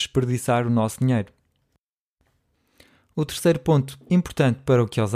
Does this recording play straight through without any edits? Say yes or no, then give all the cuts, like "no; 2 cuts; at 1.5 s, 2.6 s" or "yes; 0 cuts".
yes; 0 cuts